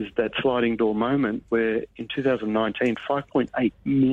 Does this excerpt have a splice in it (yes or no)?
no